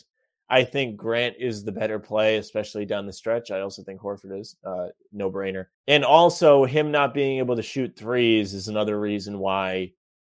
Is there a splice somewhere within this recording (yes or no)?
yes